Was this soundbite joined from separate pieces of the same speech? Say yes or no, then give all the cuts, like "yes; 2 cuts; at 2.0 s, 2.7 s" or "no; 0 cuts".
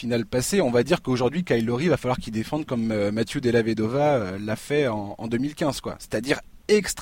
no; 0 cuts